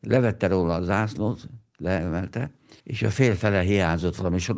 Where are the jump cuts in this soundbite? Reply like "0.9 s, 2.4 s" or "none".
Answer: 2.8 s